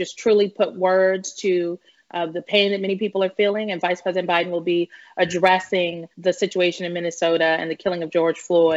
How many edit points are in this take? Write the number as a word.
one